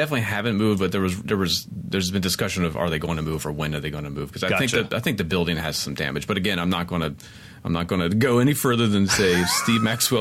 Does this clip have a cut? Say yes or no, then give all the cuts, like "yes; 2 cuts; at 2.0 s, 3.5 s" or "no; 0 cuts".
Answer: no; 0 cuts